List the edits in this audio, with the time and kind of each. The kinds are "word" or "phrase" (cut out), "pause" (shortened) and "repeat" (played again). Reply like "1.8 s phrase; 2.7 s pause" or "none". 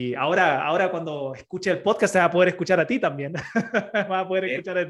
none

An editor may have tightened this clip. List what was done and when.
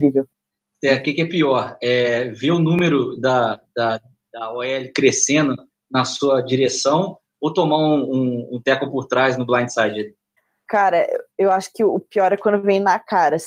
none

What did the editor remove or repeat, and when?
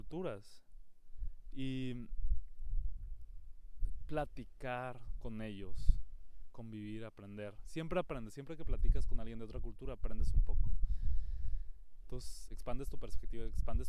12.5 s word

